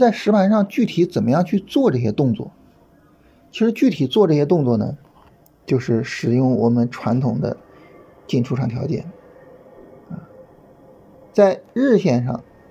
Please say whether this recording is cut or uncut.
uncut